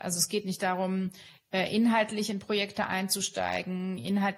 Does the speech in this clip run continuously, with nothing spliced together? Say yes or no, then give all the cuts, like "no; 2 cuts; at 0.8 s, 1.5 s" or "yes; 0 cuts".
yes; 0 cuts